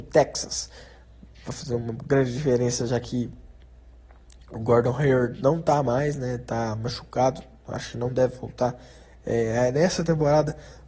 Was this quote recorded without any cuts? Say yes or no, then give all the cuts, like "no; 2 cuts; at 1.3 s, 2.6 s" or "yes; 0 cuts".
yes; 0 cuts